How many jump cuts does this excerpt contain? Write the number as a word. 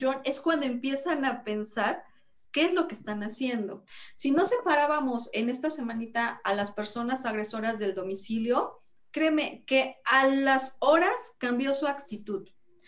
zero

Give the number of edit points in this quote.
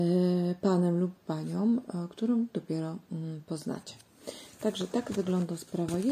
zero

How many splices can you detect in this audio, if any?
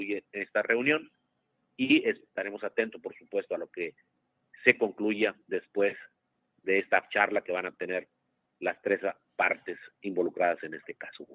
one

